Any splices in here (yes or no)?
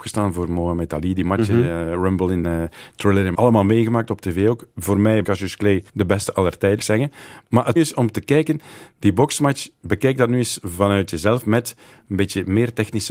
yes